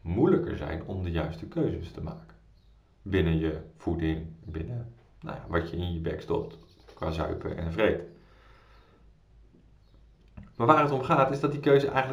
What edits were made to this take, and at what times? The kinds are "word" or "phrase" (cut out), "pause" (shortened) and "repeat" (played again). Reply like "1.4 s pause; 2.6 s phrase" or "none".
none